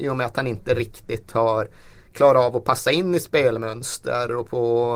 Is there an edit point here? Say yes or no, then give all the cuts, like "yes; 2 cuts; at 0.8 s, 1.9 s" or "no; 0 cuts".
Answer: no; 0 cuts